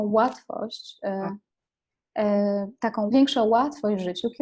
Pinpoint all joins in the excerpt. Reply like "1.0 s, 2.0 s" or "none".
3.1 s